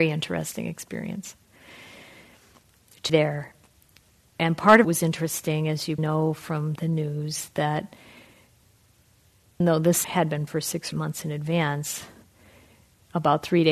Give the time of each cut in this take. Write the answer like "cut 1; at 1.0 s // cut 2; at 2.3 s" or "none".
cut 1; at 3.1 s // cut 2; at 4.8 s // cut 3; at 6.0 s // cut 4; at 6.8 s // cut 5; at 9.6 s // cut 6; at 10.0 s // cut 7; at 10.5 s // cut 8; at 10.9 s